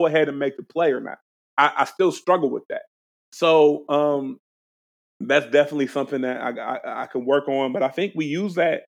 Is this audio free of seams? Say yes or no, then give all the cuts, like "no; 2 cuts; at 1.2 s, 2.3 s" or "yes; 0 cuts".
yes; 0 cuts